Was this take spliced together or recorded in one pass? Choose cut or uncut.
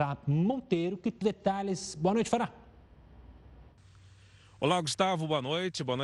cut